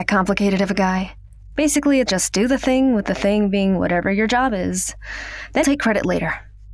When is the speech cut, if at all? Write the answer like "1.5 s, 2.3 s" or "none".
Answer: 2.1 s, 5.6 s